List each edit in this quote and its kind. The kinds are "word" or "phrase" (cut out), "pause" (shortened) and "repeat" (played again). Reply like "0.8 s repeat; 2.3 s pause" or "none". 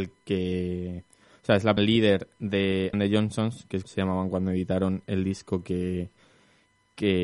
1.8 s word; 2.9 s word; 3.8 s word